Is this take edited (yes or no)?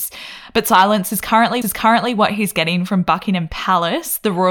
yes